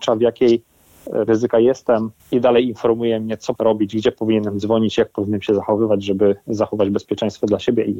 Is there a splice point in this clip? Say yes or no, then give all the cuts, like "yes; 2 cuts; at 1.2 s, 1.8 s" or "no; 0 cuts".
yes; 3 cuts; at 1.3 s, 2.2 s, 3.6 s